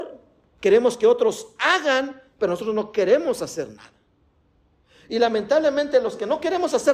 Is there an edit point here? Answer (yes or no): no